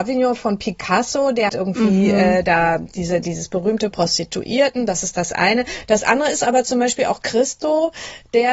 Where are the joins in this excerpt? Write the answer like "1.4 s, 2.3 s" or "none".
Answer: 1.5 s, 3.9 s